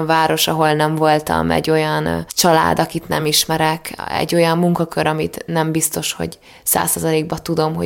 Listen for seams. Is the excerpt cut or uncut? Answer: uncut